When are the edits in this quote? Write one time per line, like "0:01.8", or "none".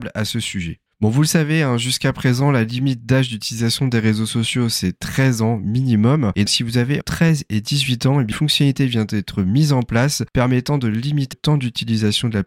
0:06.5
0:07.0
0:08.3
0:11.3